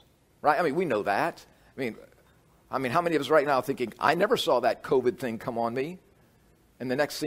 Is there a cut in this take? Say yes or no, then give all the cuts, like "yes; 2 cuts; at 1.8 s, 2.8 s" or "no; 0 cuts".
no; 0 cuts